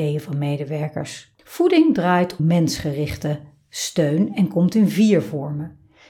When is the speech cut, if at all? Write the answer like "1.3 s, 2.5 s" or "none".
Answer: 1.4 s, 2.4 s